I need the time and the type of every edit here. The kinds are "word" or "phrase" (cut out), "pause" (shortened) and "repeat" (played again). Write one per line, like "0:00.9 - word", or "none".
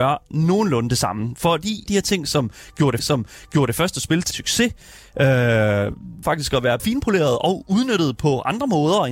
0:01.9 - phrase
0:03.0 - repeat
0:04.3 - word
0:06.2 - phrase
0:06.8 - word

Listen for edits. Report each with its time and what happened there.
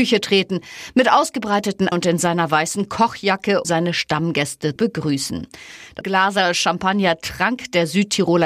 0:01.9 - word
0:03.6 - word
0:04.8 - word
0:06.0 - word

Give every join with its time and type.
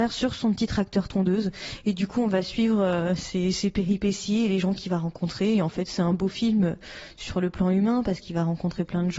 none

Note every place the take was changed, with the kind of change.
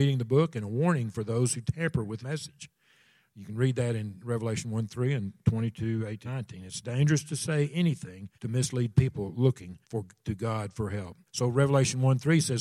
0:02.2 - word
0:06.3 - word
0:08.3 - pause
0:09.8 - pause
0:11.3 - pause

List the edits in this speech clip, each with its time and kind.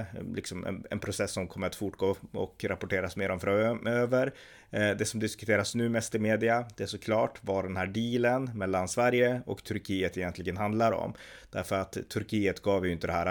none

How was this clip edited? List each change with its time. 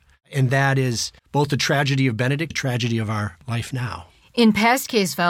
0:01.2 - pause
0:02.5 - word

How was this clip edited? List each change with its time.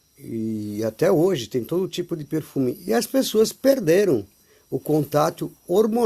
none

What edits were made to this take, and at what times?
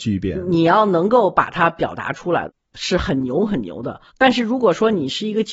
0:04.1 - pause

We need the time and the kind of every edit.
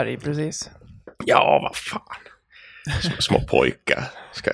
none

